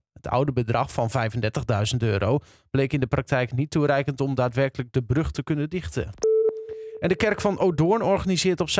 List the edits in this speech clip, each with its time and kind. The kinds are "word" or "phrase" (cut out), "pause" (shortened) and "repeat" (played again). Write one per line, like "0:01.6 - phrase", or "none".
none